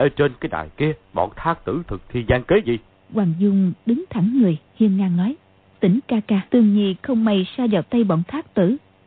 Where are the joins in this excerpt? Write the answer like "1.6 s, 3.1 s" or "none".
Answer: 1.0 s, 2.9 s, 4.7 s, 5.6 s, 6.5 s